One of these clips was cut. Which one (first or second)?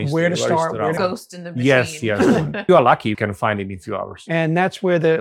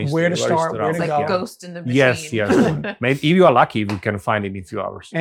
first